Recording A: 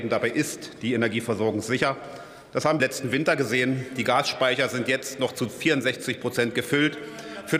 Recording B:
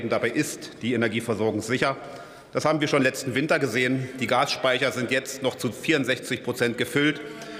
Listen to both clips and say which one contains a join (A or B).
A